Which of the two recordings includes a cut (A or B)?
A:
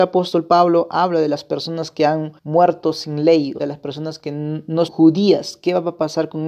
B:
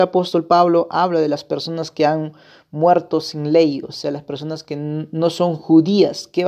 A